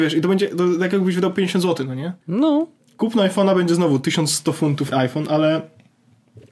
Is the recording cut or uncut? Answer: cut